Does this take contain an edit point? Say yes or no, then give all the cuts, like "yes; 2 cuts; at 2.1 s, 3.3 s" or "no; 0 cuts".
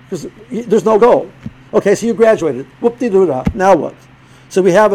yes; 1 cut; at 1.0 s